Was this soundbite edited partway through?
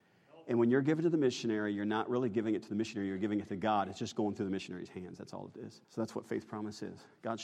yes; 1 cut; at 5.8 s

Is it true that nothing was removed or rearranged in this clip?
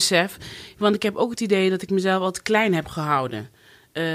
yes; 0 cuts

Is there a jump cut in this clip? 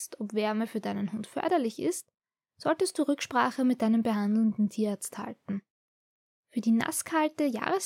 no; 0 cuts

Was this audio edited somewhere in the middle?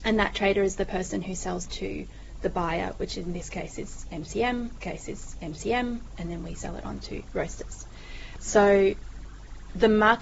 yes; 2 cuts; at 1.7 s, 4.8 s

